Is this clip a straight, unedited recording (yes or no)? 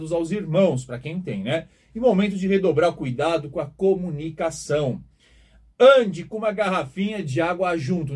yes